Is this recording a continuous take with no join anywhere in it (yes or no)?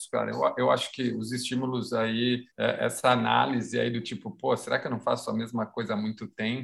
no